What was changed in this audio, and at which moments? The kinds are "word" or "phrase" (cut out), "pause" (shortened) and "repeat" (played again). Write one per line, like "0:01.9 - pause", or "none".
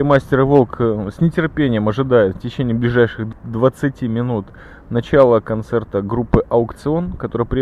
none